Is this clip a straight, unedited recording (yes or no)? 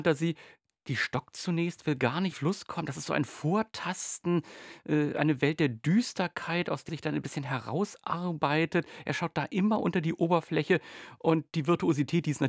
no